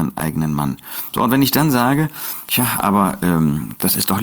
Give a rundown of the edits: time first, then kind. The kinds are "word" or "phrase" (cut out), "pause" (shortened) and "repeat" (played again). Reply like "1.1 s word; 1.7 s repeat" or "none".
none